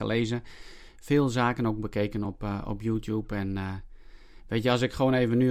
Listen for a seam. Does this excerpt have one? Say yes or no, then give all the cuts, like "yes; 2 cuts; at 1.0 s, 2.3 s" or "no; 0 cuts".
no; 0 cuts